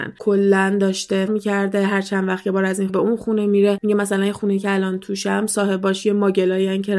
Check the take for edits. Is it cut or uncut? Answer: cut